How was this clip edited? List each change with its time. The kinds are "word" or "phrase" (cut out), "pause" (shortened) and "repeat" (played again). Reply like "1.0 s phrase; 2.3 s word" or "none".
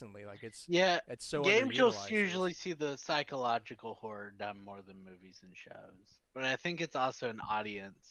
6.3 s pause